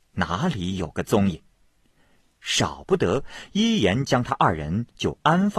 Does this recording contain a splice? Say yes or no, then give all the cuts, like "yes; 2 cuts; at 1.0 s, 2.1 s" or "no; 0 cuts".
no; 0 cuts